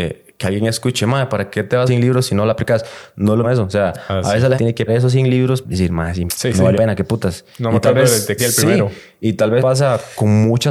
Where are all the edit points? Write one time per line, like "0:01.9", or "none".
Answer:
0:01.9
0:03.4
0:04.5
0:04.9
0:05.6
0:06.3
0:06.7
0:08.4
0:09.6